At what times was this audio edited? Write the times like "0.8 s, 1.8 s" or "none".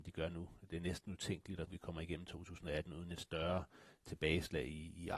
1.7 s